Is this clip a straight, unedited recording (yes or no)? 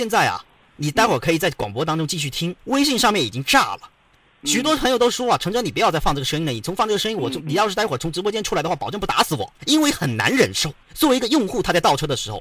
no